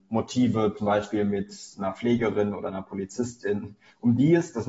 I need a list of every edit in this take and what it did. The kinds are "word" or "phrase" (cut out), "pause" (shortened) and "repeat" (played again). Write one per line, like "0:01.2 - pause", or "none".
none